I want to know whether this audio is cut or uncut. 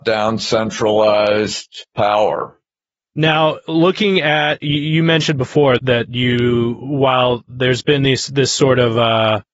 cut